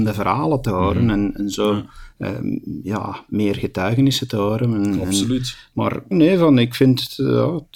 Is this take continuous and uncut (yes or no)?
no